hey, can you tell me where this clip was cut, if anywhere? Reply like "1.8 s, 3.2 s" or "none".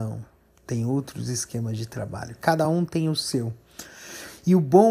none